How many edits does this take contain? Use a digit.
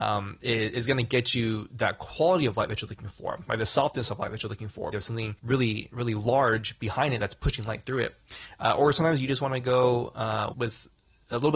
3